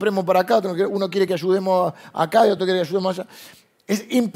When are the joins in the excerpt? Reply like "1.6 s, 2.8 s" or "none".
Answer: none